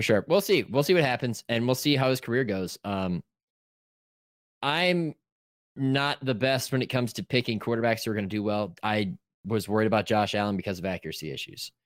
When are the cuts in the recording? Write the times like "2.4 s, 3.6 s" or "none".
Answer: none

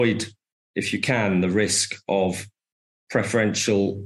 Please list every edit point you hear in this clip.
none

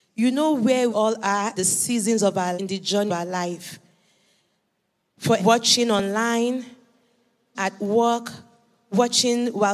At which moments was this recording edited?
0.9 s, 1.6 s, 2.6 s, 3.1 s, 5.4 s, 7.5 s

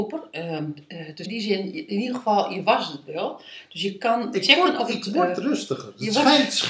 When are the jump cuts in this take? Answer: 1.3 s

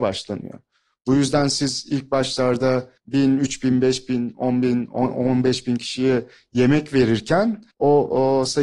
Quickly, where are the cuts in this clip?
3.0 s, 7.7 s

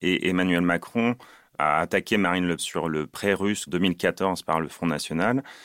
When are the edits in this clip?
2.6 s, 3.7 s

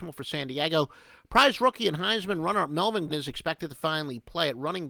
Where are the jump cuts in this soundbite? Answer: 3.1 s

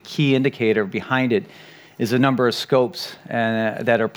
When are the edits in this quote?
none

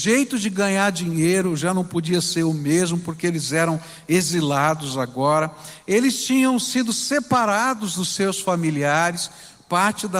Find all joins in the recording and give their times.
none

